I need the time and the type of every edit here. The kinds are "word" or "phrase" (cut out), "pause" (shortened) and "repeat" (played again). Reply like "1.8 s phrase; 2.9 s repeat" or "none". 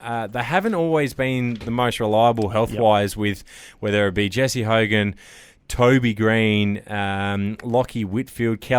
none